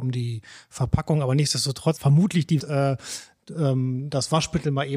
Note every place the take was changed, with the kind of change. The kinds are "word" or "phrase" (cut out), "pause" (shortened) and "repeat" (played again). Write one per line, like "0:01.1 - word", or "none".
0:02.0 - word
0:02.6 - word